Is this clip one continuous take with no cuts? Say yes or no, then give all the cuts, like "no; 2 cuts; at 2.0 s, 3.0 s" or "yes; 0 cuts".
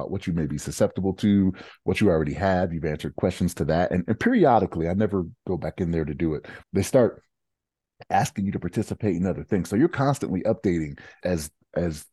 no; 3 cuts; at 4.1 s, 6.6 s, 11.2 s